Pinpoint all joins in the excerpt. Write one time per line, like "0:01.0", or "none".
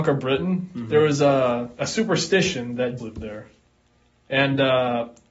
0:03.0